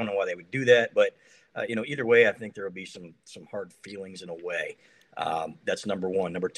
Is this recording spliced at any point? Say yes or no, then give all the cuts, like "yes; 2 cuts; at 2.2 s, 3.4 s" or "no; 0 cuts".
no; 0 cuts